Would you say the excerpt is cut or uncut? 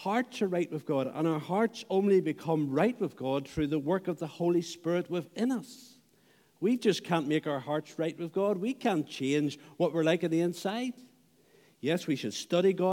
uncut